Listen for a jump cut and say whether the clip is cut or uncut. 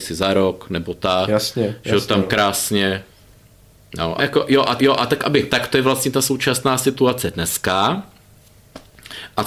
cut